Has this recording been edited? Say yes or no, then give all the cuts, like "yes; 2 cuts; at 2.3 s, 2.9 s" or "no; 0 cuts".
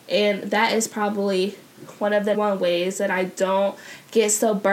yes; 1 cut; at 2.3 s